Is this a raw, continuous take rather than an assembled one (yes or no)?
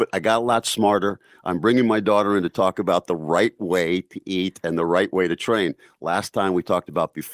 yes